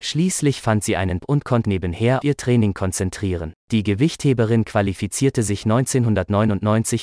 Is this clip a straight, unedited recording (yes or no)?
no